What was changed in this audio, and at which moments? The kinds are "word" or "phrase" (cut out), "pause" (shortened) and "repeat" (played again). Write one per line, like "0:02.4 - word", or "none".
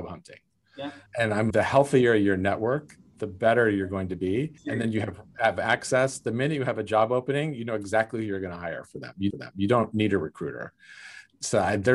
0:01.1 - pause
0:01.5 - word
0:04.6 - pause
0:09.3 - repeat

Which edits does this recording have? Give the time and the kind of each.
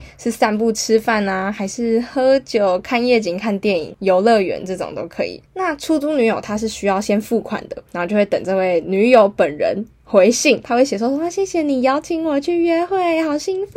0:07.9 - pause

